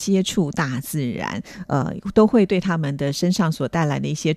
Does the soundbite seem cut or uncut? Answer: uncut